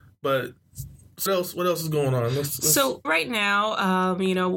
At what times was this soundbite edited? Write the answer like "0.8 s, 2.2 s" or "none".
1.3 s, 3.0 s